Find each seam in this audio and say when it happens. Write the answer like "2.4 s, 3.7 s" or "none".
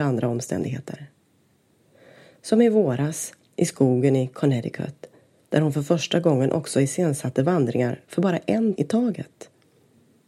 8.8 s